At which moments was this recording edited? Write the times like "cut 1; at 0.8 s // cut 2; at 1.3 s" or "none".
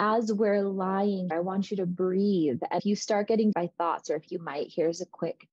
cut 1; at 1.3 s // cut 2; at 2.8 s // cut 3; at 3.5 s // cut 4; at 4.3 s